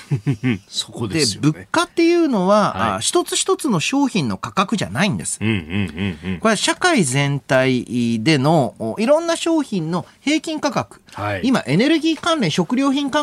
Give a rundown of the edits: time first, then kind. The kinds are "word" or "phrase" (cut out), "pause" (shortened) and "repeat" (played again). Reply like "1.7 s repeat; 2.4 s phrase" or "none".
1.9 s pause